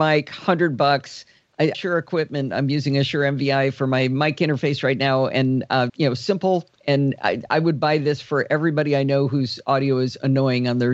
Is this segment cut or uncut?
cut